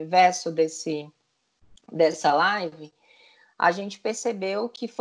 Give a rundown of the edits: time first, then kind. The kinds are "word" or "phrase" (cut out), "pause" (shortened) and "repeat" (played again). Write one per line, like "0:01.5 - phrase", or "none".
none